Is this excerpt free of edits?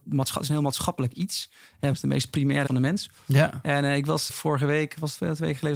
no; 3 cuts; at 1.9 s, 2.7 s, 4.3 s

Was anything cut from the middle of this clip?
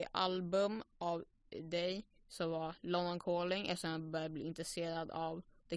no; 0 cuts

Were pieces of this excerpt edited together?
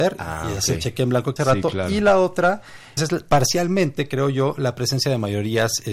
yes; 2 cuts; at 1.4 s, 3.0 s

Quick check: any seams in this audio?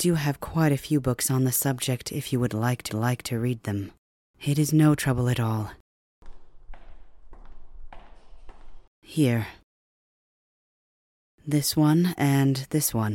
yes; 3 cuts; at 2.9 s, 4.0 s, 8.9 s

